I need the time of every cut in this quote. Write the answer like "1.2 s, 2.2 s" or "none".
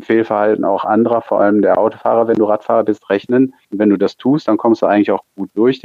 3.6 s